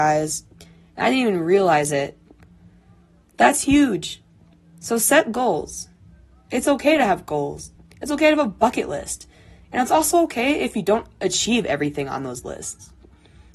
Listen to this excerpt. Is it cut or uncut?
uncut